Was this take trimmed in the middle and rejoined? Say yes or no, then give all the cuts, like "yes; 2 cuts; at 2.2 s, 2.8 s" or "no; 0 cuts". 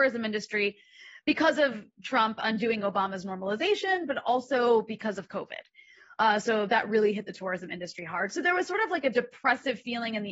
no; 0 cuts